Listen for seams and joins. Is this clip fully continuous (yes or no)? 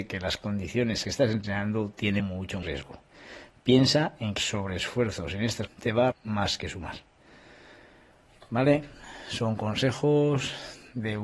no